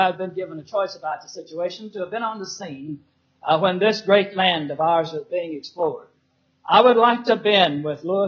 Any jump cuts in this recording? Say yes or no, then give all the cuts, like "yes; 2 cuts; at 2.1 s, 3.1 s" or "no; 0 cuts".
no; 0 cuts